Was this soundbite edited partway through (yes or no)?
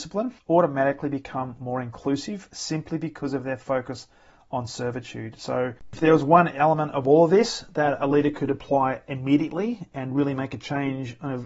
no